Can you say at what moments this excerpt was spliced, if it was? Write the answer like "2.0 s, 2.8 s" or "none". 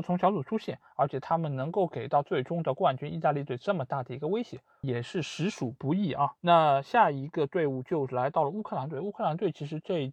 6.4 s